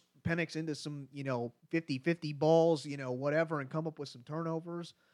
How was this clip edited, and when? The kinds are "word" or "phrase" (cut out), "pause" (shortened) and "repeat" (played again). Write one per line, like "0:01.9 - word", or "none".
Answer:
0:01.6 - pause